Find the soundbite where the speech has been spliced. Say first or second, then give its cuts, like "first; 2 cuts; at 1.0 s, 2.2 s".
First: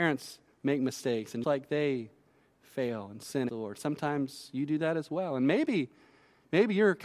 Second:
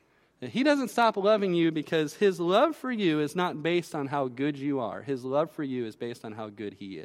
first; 2 cuts; at 1.4 s, 3.5 s